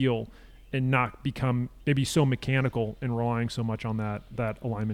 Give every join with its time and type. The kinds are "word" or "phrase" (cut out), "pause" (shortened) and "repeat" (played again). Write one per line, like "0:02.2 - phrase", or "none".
none